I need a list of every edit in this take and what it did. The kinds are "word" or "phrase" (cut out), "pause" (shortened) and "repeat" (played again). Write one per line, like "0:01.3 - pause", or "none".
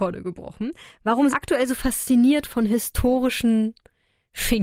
0:01.3 - phrase